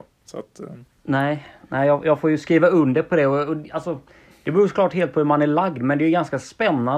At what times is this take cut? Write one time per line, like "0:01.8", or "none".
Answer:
none